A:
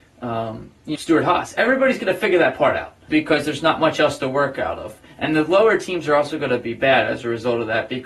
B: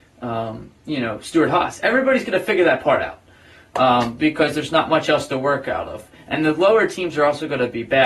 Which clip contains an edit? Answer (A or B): A